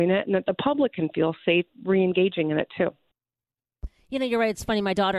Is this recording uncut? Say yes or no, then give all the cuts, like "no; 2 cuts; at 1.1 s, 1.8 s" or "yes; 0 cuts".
yes; 0 cuts